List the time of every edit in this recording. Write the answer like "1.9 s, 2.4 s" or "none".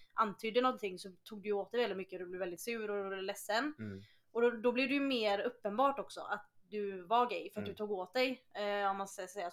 none